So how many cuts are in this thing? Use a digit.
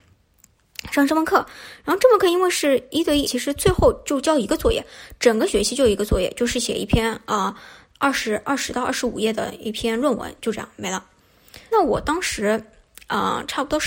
2